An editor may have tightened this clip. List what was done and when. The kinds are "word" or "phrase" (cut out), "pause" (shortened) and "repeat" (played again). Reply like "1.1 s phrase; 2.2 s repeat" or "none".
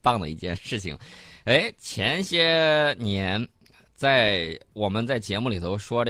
none